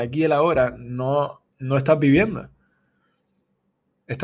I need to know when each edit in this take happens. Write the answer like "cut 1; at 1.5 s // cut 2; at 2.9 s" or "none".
cut 1; at 1.5 s